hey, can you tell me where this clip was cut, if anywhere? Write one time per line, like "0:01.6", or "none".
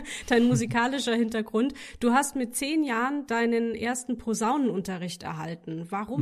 none